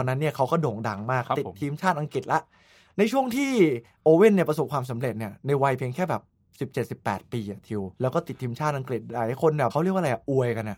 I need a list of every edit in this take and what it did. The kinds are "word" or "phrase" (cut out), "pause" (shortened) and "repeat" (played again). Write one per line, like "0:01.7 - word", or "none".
0:07.9 - pause